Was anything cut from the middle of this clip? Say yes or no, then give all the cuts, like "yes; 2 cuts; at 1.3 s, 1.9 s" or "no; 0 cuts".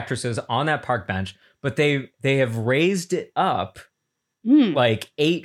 no; 0 cuts